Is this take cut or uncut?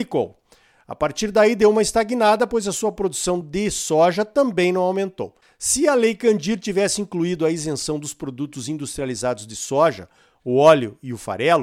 uncut